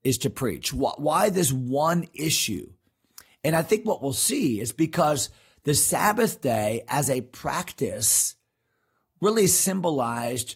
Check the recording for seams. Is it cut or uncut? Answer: uncut